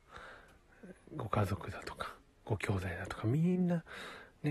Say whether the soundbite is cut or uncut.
uncut